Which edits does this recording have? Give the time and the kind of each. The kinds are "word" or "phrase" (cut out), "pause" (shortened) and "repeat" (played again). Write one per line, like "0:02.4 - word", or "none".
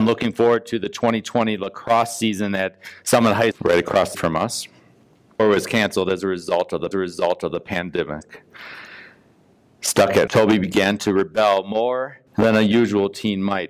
0:03.0 - pause
0:03.5 - word
0:04.1 - word
0:05.4 - word
0:06.9 - repeat
0:10.3 - word
0:12.3 - pause

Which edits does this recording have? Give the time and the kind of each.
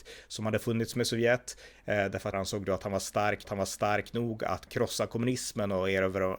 0:02.3 - word
0:03.4 - repeat
0:04.7 - word

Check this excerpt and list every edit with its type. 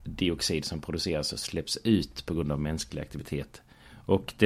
none

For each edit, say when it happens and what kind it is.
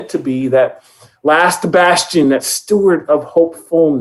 none

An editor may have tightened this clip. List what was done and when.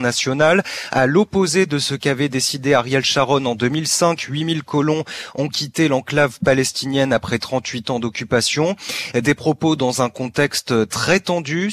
none

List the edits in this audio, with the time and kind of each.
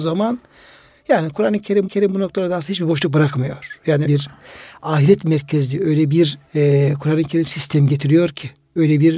0:01.9 - repeat
0:04.1 - word
0:06.4 - pause

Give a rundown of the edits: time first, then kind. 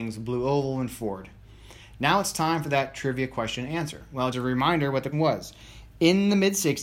0:04.3 - word
0:05.1 - word

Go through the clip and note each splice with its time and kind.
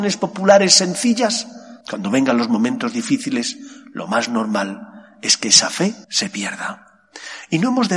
0:01.8 - pause
0:06.0 - pause

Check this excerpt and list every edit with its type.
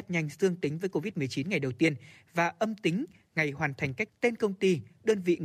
0:04.1 - word

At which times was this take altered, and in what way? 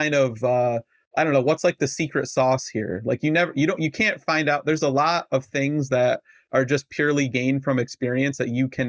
none

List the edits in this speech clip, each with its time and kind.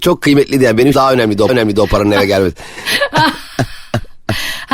0:00.9 - phrase
0:01.5 - repeat

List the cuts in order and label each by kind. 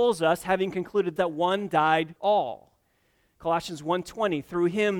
0:01.2 - word
0:02.2 - word

